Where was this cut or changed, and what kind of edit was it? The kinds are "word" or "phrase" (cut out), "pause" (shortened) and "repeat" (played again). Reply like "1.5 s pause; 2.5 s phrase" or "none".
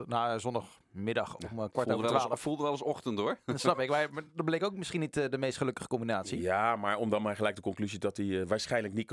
4.3 s pause